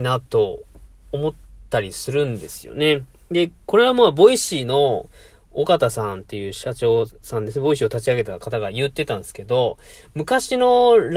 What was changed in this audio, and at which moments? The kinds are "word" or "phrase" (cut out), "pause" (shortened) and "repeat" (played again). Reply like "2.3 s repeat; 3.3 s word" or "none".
none